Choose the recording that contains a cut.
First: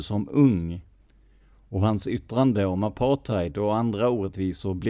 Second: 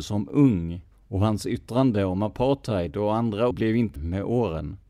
second; 3 cuts; at 0.9 s, 3.5 s, 4.0 s

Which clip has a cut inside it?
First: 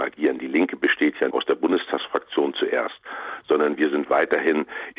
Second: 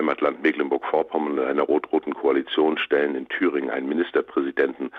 first; 1 cut; at 1.3 s

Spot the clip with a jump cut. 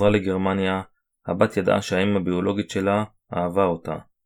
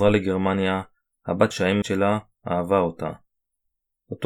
second; 2 cuts; at 1.5 s, 1.8 s

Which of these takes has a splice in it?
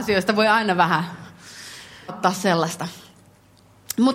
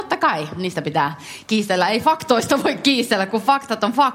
first; 1 cut; at 2.1 s

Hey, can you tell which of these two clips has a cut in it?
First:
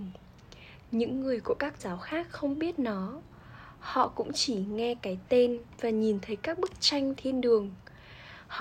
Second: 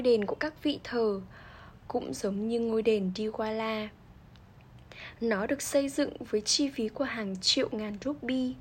first; 2 cuts; at 1.8 s, 7.2 s

